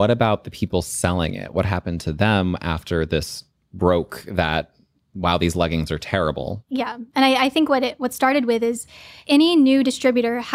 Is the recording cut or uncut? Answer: uncut